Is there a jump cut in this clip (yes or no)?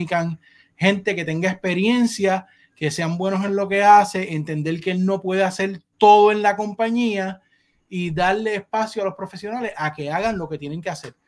no